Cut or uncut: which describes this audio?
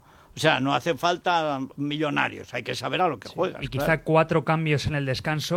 uncut